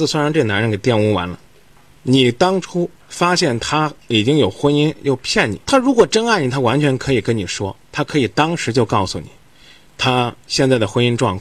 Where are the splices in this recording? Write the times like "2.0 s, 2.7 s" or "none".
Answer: 1.8 s, 3.0 s, 5.6 s, 7.8 s

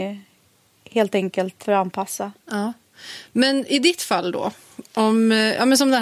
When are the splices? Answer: 1.6 s, 2.4 s

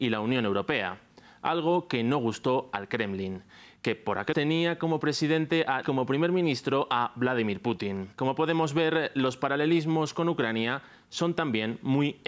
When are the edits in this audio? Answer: 4.3 s, 5.8 s, 8.1 s

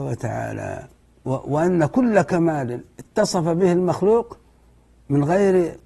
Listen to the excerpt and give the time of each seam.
1.0 s

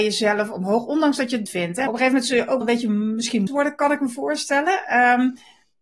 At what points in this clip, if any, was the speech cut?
1.5 s, 1.9 s, 2.6 s, 3.5 s

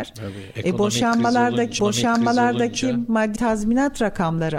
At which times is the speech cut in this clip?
1.8 s, 3.4 s

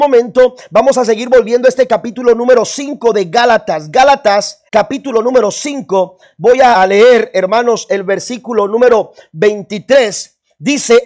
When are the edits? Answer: 4.7 s, 6.7 s

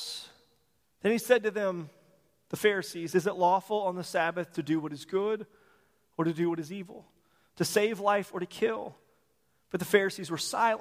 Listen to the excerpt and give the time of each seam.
none

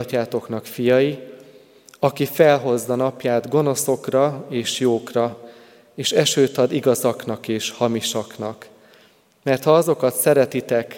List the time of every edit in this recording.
none

